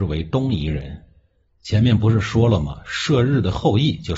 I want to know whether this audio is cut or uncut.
uncut